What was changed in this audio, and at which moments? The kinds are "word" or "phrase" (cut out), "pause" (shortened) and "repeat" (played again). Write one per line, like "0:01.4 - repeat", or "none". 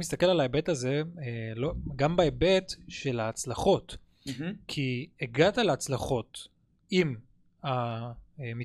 none

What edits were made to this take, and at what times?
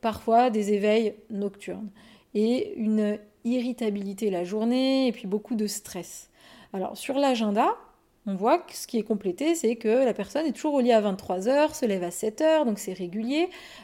none

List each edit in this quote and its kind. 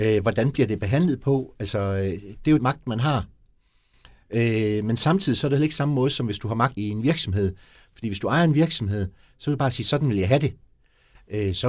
0:02.6 - word
0:06.7 - word

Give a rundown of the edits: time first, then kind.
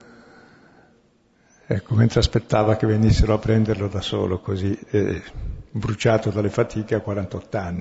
none

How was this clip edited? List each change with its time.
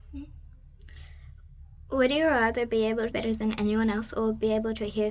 0:03.1 - phrase

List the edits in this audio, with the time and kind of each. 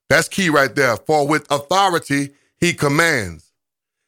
none

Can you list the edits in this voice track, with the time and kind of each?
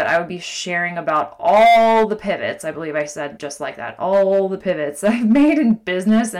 0:03.4 - word

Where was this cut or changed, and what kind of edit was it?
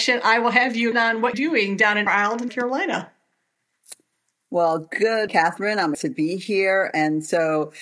0:00.9 - word
0:01.3 - word
0:02.1 - word
0:02.5 - word
0:05.3 - word
0:05.9 - word

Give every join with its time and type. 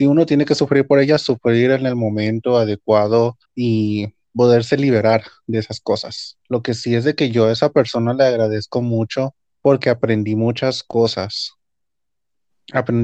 0:03.4 - pause
0:06.4 - pause
0:09.4 - pause

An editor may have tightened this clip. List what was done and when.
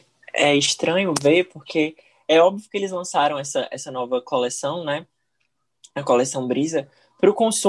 none

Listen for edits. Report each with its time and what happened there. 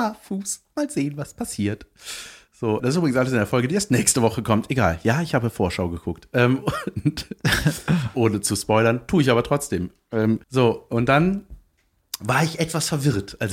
0:02.8 - word
0:10.4 - pause

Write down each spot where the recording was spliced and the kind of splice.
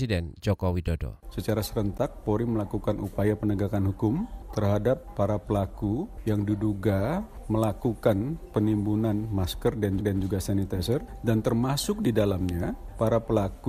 0:10.0 - repeat

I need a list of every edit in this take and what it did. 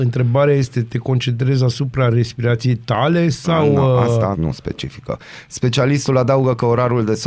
0:04.3 - word

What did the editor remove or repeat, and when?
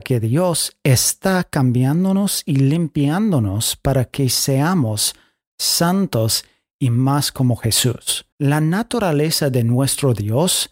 0:08.3 - pause

